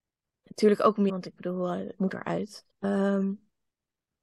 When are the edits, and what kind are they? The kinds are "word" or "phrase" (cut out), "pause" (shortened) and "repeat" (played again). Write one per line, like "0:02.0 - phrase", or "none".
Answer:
0:01.1 - word
0:02.0 - word
0:02.7 - pause